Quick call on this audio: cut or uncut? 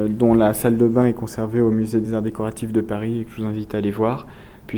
uncut